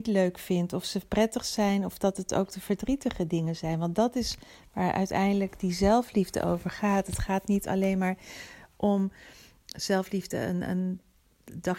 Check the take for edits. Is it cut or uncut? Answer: uncut